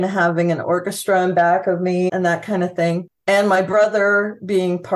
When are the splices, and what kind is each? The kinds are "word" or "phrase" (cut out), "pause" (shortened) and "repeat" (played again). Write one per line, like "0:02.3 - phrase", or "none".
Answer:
0:02.1 - word
0:03.2 - pause